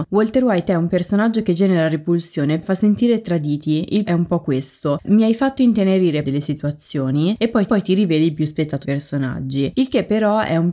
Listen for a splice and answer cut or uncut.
cut